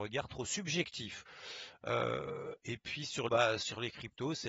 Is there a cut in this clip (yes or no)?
yes